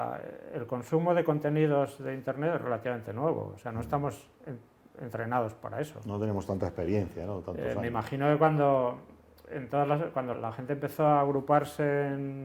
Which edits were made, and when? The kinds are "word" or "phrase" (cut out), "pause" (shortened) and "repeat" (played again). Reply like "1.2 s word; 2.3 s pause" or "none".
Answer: 10.3 s word